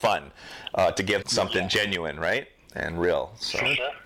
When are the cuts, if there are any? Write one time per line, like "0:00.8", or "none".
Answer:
0:01.2